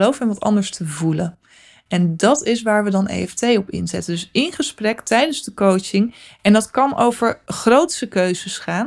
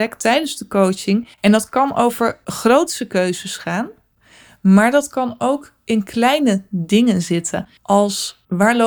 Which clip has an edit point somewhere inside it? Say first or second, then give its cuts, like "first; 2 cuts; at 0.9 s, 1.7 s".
second; 2 cuts; at 1.3 s, 7.8 s